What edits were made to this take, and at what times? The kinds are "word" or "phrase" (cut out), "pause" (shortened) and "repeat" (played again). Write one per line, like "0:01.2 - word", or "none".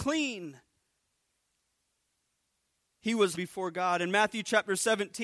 0:03.4 - word